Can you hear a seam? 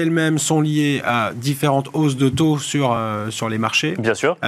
no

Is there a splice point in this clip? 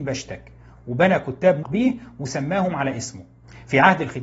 yes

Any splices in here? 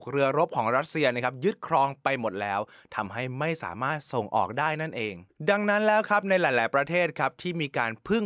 no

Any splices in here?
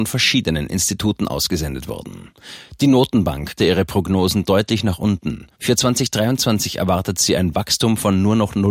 yes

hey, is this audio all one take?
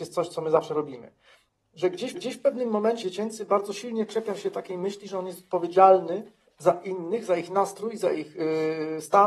no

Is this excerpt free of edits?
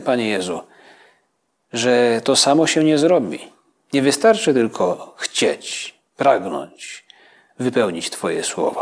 yes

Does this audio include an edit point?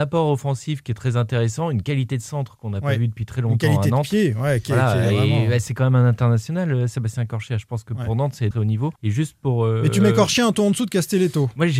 yes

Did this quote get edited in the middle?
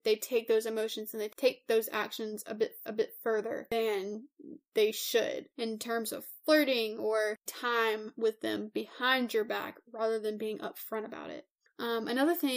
yes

